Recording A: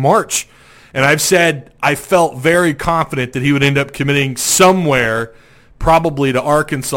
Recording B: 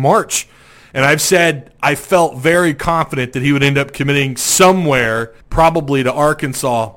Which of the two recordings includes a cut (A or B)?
B